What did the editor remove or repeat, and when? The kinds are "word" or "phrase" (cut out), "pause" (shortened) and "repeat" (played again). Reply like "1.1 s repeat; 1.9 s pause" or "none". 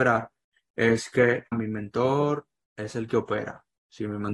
1.5 s word